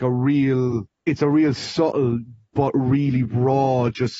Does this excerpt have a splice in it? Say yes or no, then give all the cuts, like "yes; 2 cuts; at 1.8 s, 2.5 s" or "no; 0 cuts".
yes; 1 cut; at 0.9 s